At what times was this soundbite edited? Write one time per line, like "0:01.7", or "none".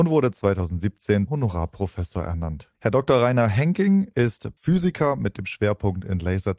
0:01.3
0:02.7
0:04.6